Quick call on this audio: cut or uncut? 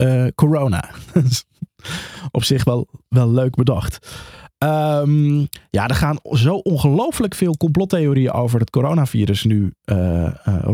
uncut